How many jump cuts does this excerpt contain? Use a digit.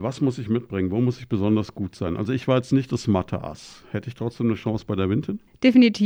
0